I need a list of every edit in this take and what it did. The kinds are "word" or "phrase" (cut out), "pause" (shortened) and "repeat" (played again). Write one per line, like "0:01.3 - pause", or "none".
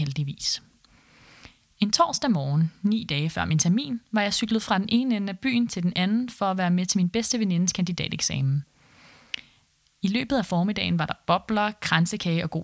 none